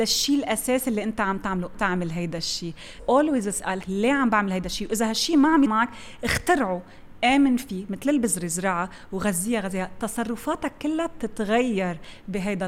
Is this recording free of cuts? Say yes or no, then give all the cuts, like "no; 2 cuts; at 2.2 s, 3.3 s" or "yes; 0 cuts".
no; 4 cuts; at 1.7 s, 3.0 s, 3.8 s, 5.7 s